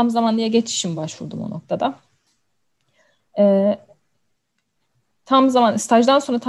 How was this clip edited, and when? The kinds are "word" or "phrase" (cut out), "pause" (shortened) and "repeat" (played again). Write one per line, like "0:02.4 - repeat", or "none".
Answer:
none